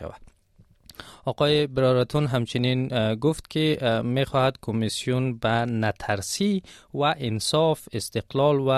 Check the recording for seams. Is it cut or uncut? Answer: uncut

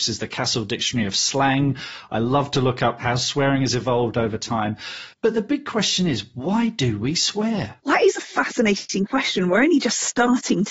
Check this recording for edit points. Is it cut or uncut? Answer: cut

